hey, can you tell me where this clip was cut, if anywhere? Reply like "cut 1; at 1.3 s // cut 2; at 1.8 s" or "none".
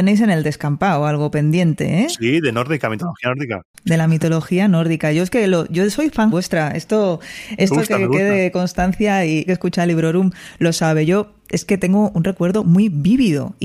cut 1; at 3.7 s // cut 2; at 6.3 s // cut 3; at 9.5 s